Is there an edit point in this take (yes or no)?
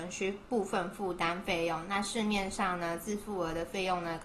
no